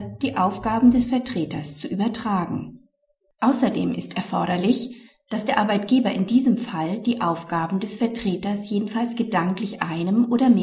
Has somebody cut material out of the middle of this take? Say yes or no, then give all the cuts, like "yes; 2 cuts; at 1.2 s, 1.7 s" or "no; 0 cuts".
no; 0 cuts